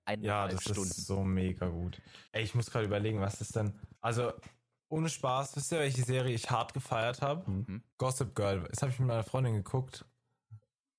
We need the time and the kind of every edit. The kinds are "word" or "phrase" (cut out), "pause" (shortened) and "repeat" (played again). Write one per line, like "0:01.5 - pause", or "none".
0:02.3 - pause
0:03.9 - pause
0:07.9 - pause